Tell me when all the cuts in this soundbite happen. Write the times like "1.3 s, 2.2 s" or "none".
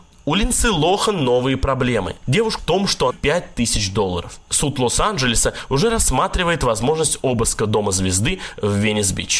2.6 s, 3.1 s, 4.4 s

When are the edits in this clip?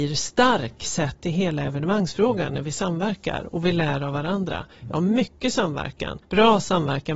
6.2 s

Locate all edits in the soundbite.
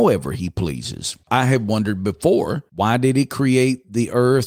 1.2 s

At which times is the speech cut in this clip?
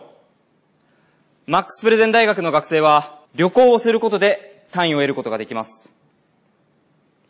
3.3 s

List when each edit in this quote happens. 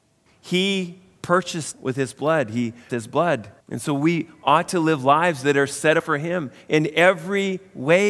1.7 s, 2.9 s, 3.6 s, 6.0 s

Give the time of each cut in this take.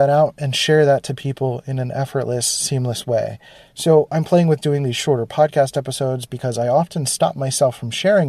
none

